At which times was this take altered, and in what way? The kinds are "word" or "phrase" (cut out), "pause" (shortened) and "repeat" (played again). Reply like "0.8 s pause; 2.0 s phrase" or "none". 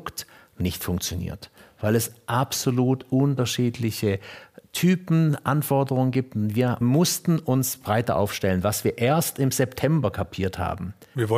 6.8 s word